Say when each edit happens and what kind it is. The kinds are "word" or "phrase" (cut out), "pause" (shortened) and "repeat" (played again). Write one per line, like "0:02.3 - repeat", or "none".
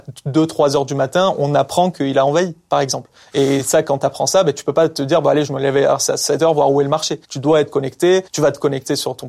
0:07.2 - pause
0:08.3 - pause